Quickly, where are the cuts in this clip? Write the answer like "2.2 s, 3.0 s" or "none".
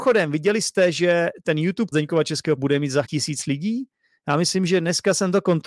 1.9 s, 2.6 s, 3.0 s